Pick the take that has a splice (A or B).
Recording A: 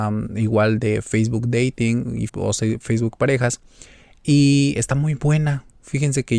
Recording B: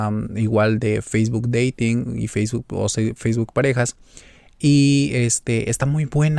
A